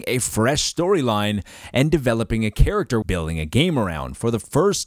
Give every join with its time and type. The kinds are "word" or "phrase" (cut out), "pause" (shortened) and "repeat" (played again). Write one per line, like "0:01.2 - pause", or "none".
0:03.0 - word